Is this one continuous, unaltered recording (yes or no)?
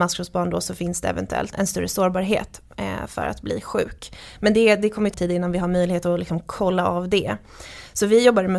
no